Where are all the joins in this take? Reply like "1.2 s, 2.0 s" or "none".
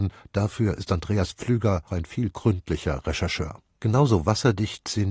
1.9 s, 2.3 s